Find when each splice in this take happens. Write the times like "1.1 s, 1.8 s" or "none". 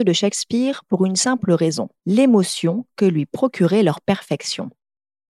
2.0 s